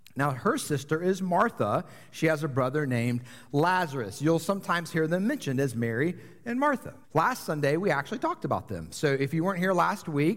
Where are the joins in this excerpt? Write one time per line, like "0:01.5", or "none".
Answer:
0:07.0

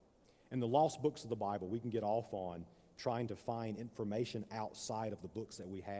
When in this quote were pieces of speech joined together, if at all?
none

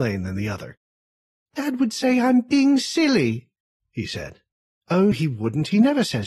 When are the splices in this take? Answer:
0:05.1

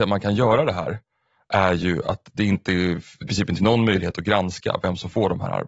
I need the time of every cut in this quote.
0:03.3
0:03.6

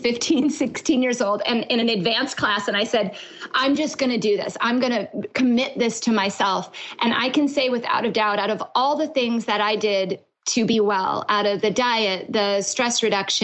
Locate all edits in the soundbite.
none

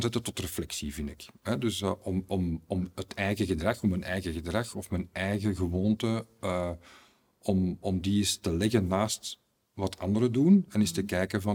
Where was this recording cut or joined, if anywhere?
none

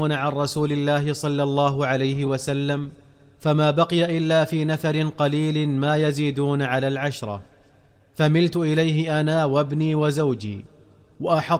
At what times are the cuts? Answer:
none

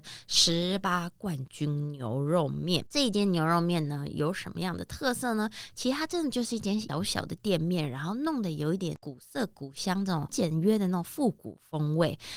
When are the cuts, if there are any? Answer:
0:02.9

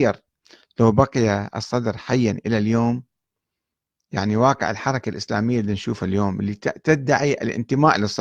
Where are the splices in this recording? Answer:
none

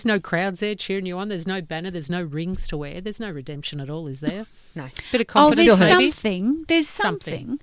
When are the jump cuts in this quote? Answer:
none

